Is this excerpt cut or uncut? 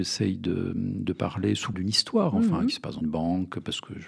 cut